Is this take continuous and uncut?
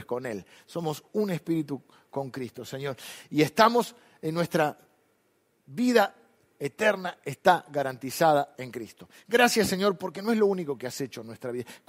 yes; 0 cuts

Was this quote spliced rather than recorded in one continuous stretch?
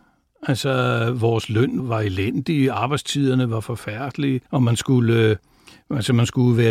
yes; 2 cuts; at 1.8 s, 4.5 s

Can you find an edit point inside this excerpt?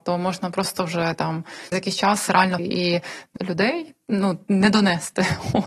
yes; 3 cuts; at 1.7 s, 2.6 s, 3.4 s

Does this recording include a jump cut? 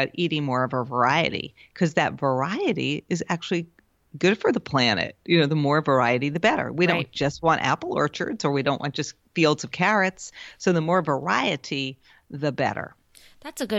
no; 0 cuts

